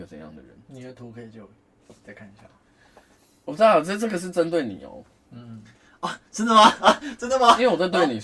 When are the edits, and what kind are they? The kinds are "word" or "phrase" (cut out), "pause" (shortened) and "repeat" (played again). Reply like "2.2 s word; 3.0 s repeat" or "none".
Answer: 3.2 s pause